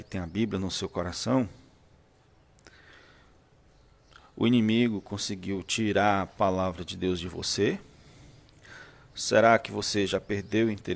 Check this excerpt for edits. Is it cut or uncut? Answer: uncut